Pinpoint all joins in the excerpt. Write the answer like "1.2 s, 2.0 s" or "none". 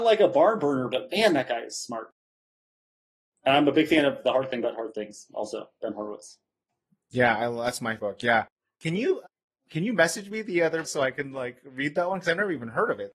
8.0 s, 10.8 s

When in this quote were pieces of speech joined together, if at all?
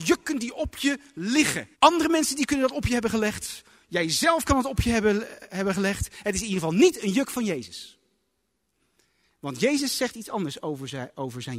1.7 s

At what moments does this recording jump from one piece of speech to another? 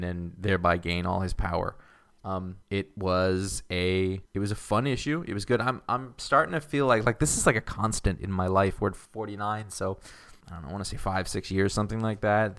2.6 s, 4.3 s, 9.1 s, 10.4 s

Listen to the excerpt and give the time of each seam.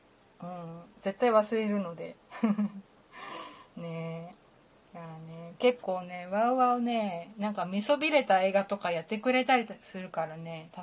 none

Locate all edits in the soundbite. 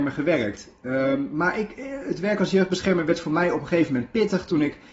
none

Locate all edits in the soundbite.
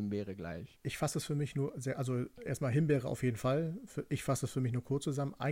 none

